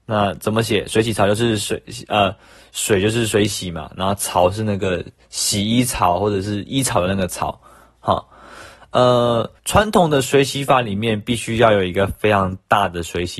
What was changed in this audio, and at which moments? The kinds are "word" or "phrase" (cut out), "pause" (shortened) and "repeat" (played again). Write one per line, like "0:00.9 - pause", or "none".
0:09.6 - pause